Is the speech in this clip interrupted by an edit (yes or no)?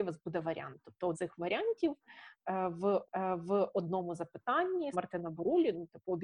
yes